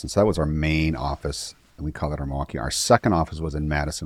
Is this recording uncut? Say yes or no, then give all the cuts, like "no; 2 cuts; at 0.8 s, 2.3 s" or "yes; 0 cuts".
yes; 0 cuts